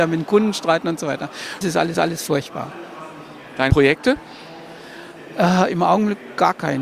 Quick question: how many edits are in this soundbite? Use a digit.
3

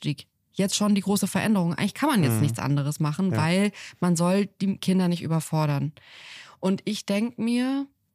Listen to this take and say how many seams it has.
0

